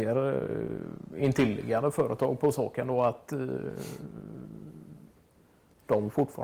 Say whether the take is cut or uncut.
uncut